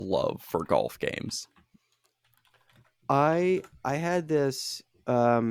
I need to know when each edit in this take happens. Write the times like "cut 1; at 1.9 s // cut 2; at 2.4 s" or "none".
none